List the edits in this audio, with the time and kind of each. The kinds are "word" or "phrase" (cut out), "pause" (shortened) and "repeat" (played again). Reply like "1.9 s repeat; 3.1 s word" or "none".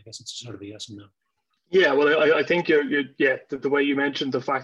none